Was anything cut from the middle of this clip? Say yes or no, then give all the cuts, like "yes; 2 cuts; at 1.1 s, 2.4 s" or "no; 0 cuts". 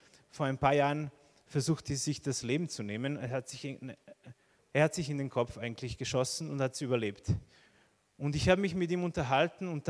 no; 0 cuts